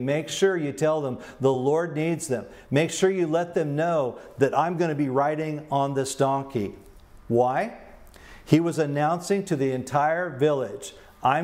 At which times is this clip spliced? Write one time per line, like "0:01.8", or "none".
none